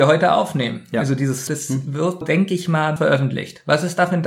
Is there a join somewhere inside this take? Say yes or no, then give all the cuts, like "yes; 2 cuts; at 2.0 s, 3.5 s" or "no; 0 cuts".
yes; 3 cuts; at 1.5 s, 2.2 s, 3.0 s